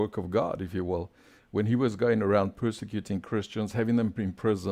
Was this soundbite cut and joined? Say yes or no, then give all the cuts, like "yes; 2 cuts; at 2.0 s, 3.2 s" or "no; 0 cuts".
no; 0 cuts